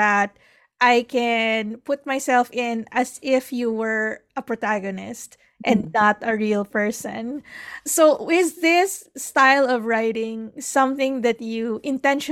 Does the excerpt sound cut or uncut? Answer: uncut